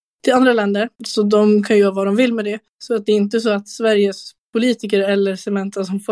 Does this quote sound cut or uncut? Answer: cut